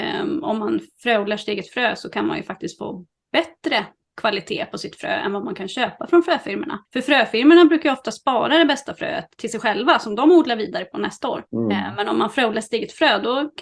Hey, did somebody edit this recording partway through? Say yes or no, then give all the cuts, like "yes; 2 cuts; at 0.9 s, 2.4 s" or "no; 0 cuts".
no; 0 cuts